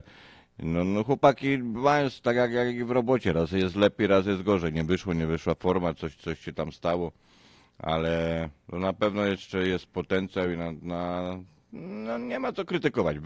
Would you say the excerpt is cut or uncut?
uncut